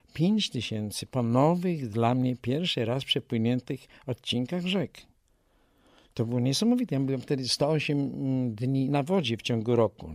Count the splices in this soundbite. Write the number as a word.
zero